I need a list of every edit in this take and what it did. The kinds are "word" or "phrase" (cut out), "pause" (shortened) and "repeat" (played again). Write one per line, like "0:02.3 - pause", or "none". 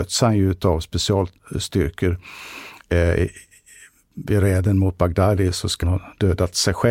0:05.8 - word